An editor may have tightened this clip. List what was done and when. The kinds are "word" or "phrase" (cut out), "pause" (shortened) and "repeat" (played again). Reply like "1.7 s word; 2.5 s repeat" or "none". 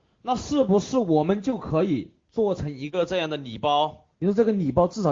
4.1 s pause